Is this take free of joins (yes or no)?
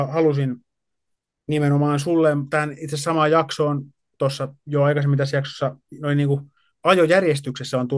yes